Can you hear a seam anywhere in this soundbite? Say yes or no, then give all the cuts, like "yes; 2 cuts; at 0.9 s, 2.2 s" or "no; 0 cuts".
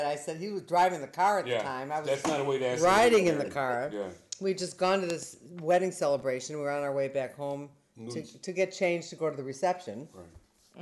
no; 0 cuts